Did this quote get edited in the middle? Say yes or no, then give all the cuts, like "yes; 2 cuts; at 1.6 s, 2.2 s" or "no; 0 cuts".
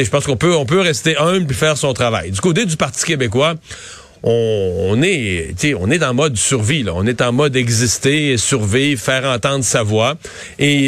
no; 0 cuts